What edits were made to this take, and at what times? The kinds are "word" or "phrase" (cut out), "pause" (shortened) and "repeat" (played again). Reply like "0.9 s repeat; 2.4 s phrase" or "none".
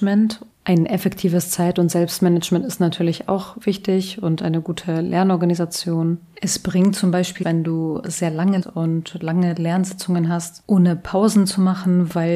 7.4 s word; 8.6 s word